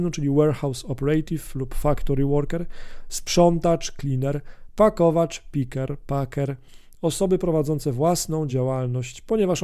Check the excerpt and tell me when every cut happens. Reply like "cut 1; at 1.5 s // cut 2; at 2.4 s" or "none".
none